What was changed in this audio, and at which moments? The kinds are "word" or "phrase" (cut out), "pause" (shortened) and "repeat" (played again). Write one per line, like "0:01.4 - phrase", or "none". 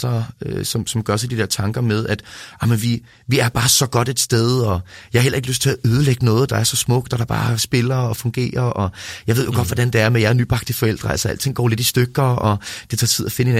none